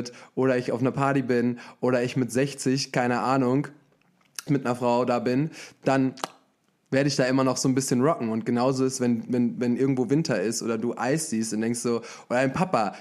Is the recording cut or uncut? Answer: cut